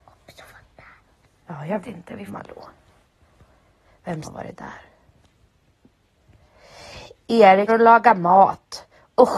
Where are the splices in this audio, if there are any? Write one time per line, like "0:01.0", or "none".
0:01.8
0:02.3
0:04.2
0:07.7